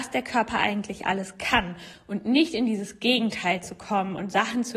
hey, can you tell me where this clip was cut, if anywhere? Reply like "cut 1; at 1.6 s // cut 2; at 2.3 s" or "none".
none